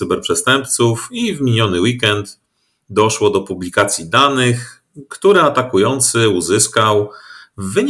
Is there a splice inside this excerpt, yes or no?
no